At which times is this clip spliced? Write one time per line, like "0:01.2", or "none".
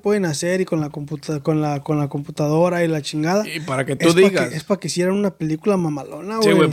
none